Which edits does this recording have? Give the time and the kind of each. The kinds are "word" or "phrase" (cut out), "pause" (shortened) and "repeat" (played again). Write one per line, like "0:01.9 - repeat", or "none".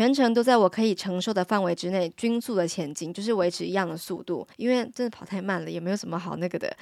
0:04.5 - pause